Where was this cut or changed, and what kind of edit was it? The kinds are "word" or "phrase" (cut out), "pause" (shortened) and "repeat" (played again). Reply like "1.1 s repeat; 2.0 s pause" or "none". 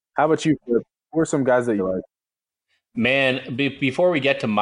1.8 s phrase